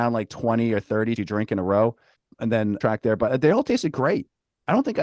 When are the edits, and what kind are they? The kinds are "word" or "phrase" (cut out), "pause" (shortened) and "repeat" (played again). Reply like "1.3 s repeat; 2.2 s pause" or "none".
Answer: 1.2 s word; 2.8 s phrase